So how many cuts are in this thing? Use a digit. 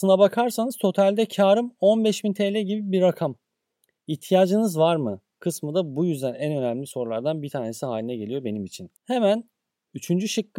0